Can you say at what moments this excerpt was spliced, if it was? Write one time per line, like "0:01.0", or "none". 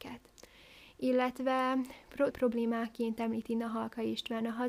0:02.3